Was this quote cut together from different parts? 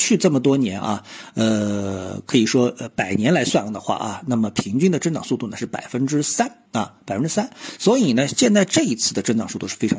yes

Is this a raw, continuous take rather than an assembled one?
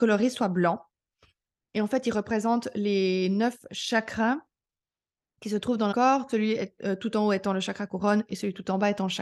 no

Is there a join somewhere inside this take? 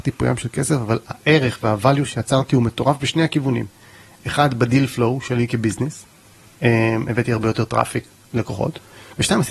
no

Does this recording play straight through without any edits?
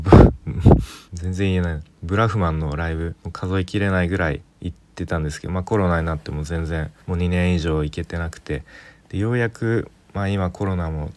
no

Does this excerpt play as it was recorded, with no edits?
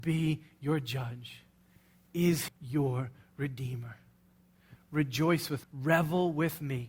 no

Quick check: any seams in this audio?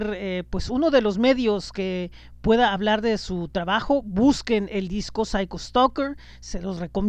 no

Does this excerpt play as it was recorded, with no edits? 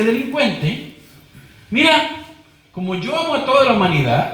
yes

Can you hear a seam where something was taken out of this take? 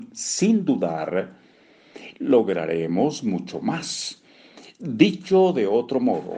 no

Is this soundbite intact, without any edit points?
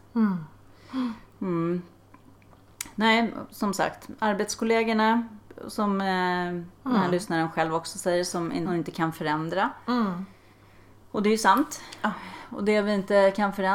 no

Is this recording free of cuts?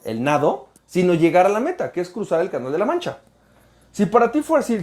yes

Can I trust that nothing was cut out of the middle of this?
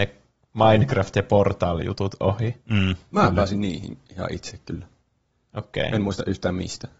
yes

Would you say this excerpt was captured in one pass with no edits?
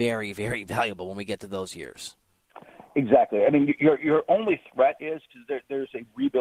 yes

